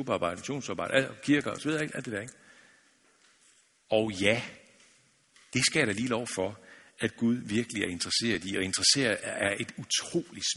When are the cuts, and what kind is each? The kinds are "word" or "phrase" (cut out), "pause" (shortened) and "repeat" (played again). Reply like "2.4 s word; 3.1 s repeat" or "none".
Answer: none